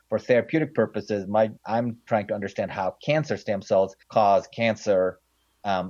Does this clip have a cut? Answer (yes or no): yes